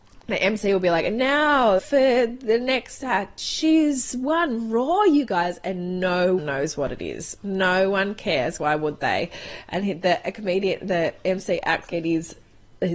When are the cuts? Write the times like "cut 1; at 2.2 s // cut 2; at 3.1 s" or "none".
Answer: cut 1; at 1.8 s // cut 2; at 6.4 s // cut 3; at 8.6 s // cut 4; at 11.9 s